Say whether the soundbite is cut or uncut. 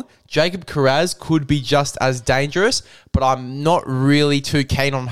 uncut